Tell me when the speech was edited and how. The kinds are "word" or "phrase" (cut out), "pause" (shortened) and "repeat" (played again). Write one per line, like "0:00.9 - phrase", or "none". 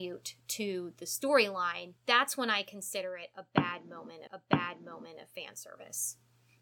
0:02.0 - pause
0:04.3 - repeat